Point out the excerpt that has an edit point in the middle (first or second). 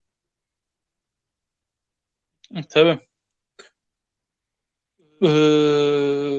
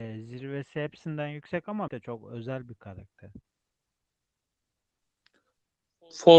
second